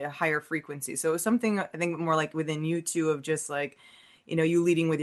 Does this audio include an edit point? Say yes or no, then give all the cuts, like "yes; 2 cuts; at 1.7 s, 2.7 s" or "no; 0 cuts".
no; 0 cuts